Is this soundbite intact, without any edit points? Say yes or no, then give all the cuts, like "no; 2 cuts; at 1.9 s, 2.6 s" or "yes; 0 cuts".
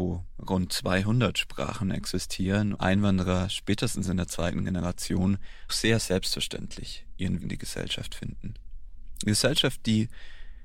no; 3 cuts; at 2.7 s, 5.7 s, 7.4 s